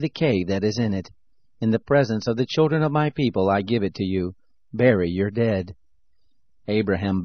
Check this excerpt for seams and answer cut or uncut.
uncut